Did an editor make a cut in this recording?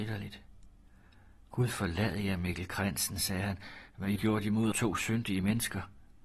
yes; 2 cuts; at 4.2 s, 4.7 s

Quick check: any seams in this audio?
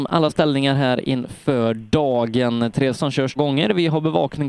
yes; 2 cuts; at 3.0 s, 3.4 s

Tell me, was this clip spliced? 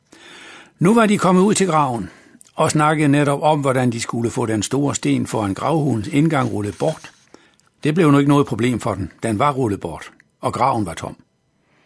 yes; 2 cuts; at 7.5 s, 10.3 s

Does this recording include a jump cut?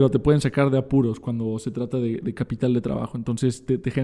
no; 0 cuts

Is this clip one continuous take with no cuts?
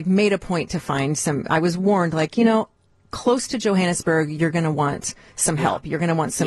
yes; 0 cuts

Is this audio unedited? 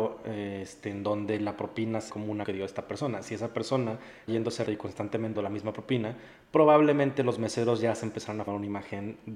no; 6 cuts; at 2.1 s, 2.4 s, 4.3 s, 4.6 s, 5.3 s, 8.5 s

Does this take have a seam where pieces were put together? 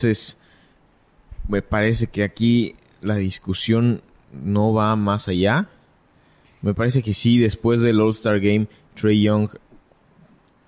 no; 0 cuts

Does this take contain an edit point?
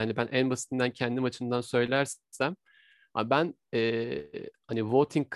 no; 0 cuts

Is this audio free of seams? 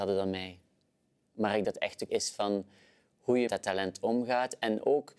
no; 3 cuts; at 1.6 s, 2.1 s, 3.5 s

